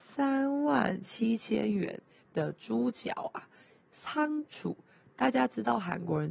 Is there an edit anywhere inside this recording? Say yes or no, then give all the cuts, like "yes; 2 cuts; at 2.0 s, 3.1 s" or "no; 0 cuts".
no; 0 cuts